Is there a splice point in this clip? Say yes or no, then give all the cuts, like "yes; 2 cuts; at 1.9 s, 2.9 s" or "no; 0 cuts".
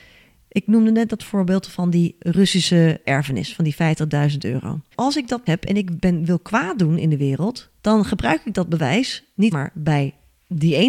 yes; 5 cuts; at 3.0 s, 4.9 s, 5.5 s, 7.8 s, 9.5 s